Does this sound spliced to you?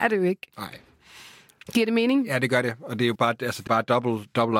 yes; 2 cuts; at 3.2 s, 3.7 s

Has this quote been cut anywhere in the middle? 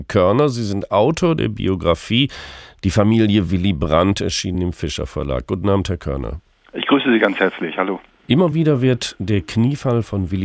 no; 0 cuts

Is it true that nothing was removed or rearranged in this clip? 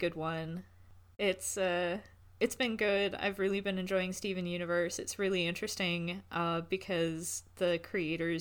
yes; 0 cuts

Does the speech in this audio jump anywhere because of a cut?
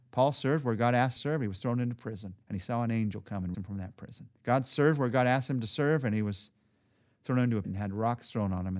yes; 5 cuts; at 1.2 s, 2.4 s, 3.5 s, 4.4 s, 7.6 s

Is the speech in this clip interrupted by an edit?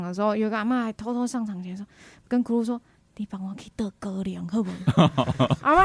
no; 0 cuts

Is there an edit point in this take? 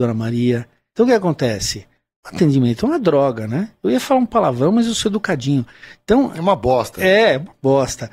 no; 0 cuts

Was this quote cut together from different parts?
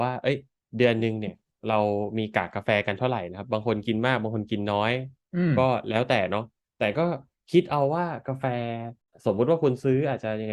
no; 0 cuts

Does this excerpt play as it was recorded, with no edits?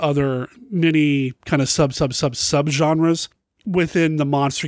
yes; 0 cuts

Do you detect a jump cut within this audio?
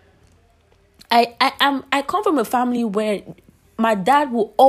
no; 0 cuts

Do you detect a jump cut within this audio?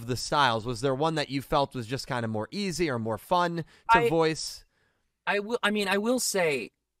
no; 0 cuts

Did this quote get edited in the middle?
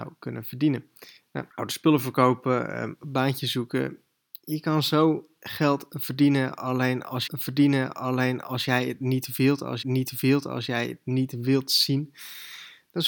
yes; 3 cuts; at 1.5 s, 7.3 s, 9.8 s

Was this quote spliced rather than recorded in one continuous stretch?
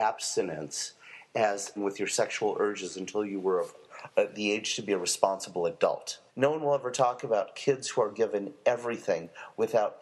yes; 2 cuts; at 1.8 s, 6.3 s

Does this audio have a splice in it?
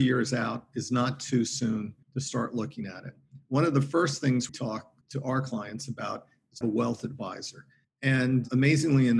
yes; 5 cuts; at 2.0 s, 4.5 s, 5.0 s, 6.6 s, 7.8 s

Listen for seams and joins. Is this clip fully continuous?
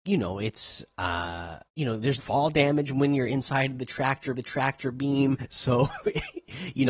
no; 3 cuts; at 1.7 s, 2.2 s, 4.3 s

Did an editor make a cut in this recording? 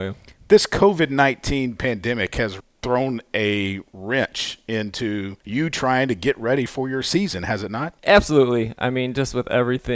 yes; 3 cuts; at 2.6 s, 5.4 s, 8.0 s

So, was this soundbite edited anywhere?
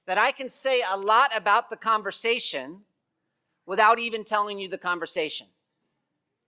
no; 0 cuts

